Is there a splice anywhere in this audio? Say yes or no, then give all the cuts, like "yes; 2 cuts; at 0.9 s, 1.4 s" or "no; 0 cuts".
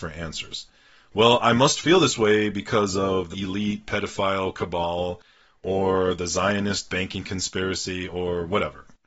yes; 1 cut; at 3.3 s